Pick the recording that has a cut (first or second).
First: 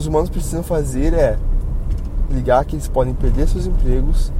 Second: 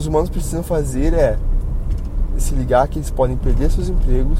first